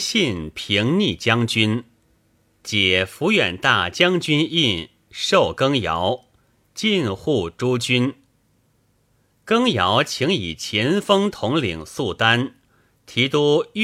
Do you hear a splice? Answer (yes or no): no